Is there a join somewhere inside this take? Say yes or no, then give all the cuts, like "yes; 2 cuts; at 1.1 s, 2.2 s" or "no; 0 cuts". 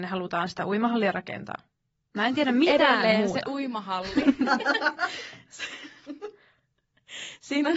no; 0 cuts